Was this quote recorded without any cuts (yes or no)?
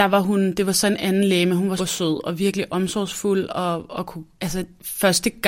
no